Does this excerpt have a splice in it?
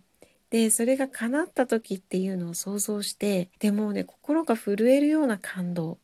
yes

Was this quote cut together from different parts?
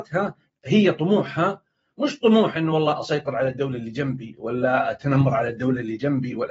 no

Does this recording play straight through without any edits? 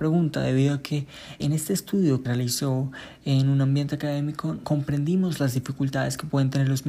no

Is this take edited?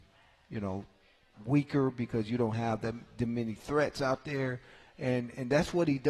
no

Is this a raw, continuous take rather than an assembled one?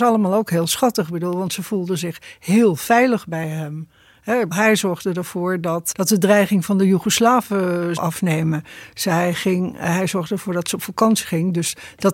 no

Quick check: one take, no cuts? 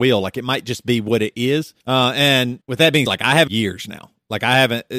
no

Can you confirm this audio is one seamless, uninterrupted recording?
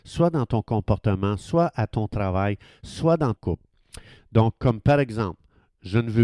no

